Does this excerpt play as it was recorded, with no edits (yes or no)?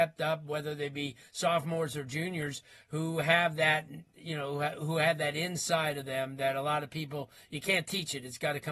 yes